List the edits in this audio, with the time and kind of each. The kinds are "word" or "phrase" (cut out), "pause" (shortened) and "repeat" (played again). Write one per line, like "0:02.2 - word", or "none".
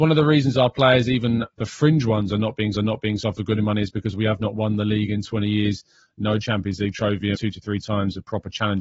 0:02.8 - repeat
0:07.4 - word